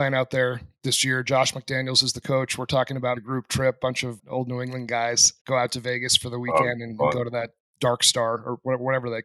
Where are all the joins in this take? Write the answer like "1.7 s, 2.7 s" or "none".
3.2 s, 4.2 s, 5.4 s